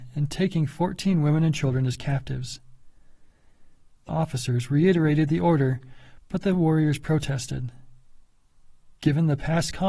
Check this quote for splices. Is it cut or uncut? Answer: cut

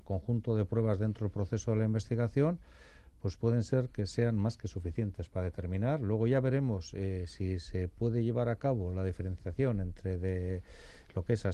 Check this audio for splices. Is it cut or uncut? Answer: uncut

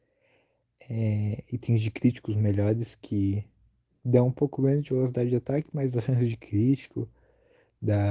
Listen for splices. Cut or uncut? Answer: uncut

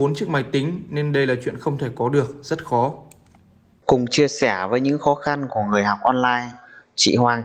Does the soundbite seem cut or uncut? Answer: uncut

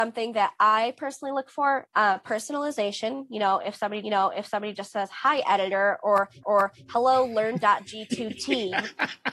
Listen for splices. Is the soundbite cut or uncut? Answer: cut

